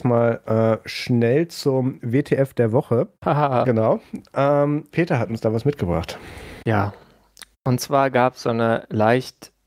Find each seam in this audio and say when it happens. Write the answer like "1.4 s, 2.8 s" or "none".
3.1 s, 3.6 s, 4.9 s

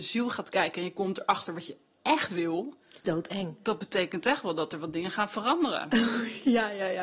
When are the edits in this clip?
2.8 s

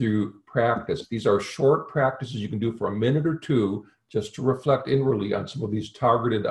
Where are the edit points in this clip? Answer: none

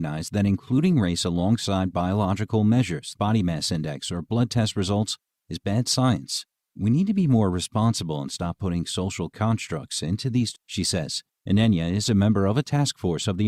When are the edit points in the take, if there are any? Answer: 3.1 s, 6.5 s, 10.5 s, 11.3 s

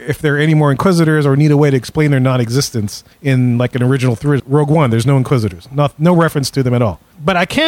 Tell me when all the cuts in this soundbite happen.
3.1 s, 4.4 s

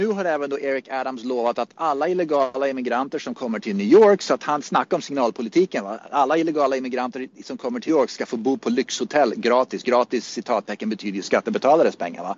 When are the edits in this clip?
7.9 s

